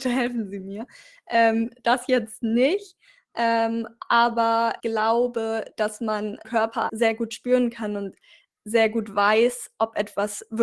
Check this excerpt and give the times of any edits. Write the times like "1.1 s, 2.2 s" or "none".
4.8 s, 6.4 s, 6.9 s

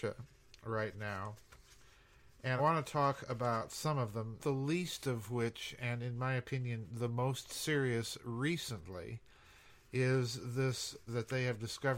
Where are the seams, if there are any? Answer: 2.6 s, 4.4 s, 11.1 s

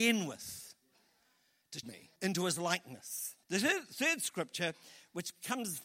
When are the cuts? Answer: 1.8 s, 2.2 s, 3.4 s

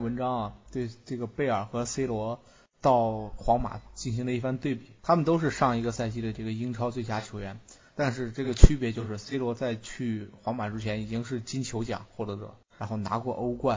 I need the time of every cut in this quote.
5.0 s

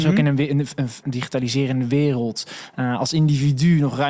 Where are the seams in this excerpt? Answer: 1.0 s

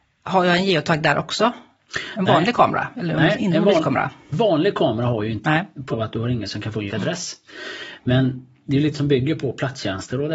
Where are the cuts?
4.3 s, 5.4 s, 5.9 s, 6.4 s, 6.9 s, 8.9 s

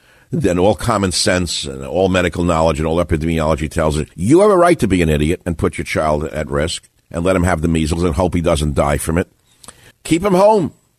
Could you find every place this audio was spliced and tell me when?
4.1 s, 9.9 s

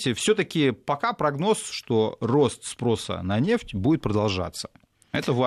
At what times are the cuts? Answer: none

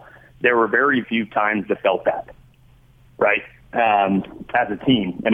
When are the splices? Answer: 1.0 s, 1.7 s

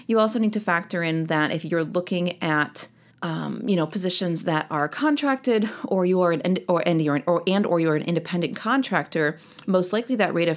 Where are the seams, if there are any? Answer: 3.1 s

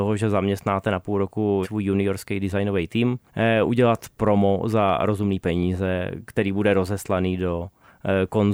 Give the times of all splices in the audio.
1.6 s, 3.3 s

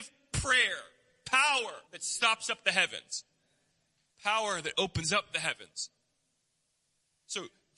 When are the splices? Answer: 1.9 s

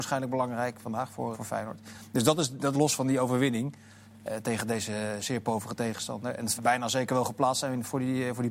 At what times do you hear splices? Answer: 1.3 s, 2.7 s, 6.6 s

